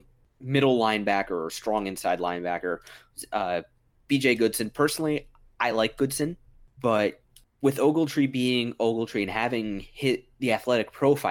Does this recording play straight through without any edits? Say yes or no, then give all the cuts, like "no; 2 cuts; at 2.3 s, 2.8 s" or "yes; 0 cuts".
yes; 0 cuts